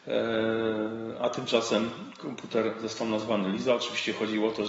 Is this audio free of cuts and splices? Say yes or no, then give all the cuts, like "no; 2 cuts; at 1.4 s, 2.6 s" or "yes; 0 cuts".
yes; 0 cuts